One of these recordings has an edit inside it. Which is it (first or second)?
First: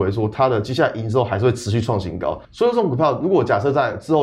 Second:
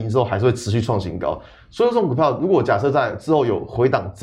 first